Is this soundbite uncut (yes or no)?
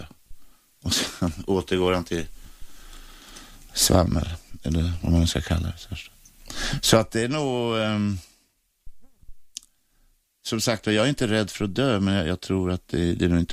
no